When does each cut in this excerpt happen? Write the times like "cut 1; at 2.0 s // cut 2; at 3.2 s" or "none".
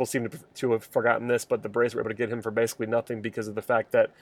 none